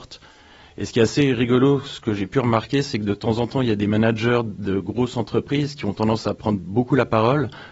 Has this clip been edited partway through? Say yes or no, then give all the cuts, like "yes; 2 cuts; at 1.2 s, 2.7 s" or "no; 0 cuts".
no; 0 cuts